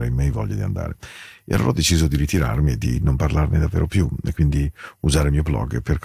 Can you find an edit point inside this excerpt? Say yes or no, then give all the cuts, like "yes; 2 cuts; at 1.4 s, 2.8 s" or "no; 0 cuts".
no; 0 cuts